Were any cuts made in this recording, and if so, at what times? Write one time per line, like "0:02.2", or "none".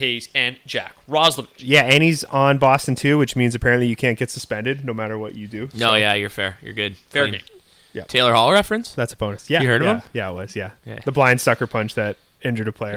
none